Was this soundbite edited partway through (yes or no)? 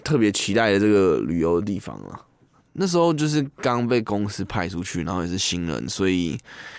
no